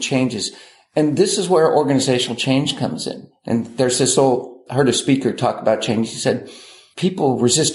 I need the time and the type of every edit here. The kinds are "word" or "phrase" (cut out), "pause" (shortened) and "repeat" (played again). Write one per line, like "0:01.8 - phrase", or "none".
0:04.7 - word